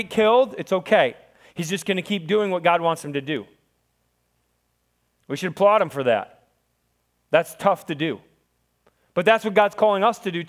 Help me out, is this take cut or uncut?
uncut